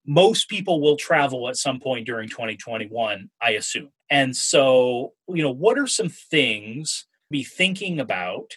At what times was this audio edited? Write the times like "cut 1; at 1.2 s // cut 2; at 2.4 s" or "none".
cut 1; at 4.0 s // cut 2; at 7.3 s